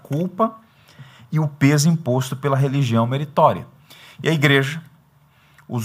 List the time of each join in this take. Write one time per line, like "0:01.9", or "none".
none